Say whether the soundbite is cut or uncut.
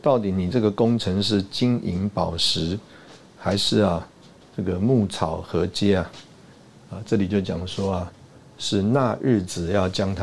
uncut